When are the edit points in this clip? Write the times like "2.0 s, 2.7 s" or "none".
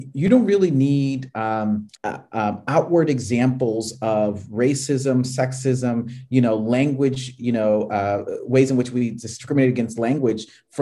1.9 s